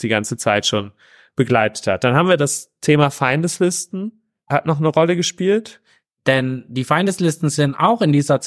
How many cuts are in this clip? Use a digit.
0